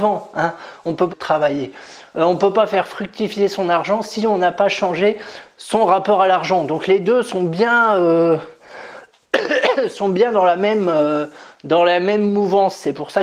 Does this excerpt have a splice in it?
yes; 1 cut; at 1.1 s

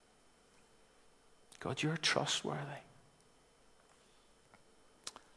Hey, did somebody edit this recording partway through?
no; 0 cuts

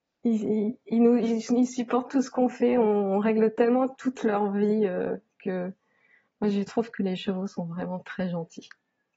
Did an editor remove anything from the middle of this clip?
yes; 1 cut; at 2.1 s

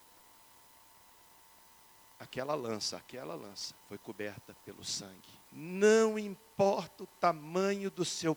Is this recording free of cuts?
no; 2 cuts; at 3.8 s, 5.4 s

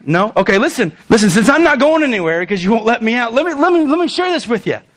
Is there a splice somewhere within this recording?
yes; 1 cut; at 1.0 s

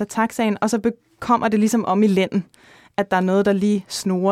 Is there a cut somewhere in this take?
no; 0 cuts

